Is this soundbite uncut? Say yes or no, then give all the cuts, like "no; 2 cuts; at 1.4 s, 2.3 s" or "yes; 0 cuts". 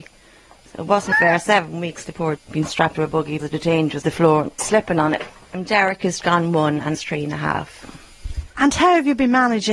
no; 9 cuts; at 1.1 s, 2.0 s, 2.4 s, 2.9 s, 3.4 s, 4.0 s, 4.6 s, 6.2 s, 6.9 s